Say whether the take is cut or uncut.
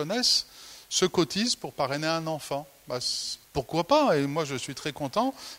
cut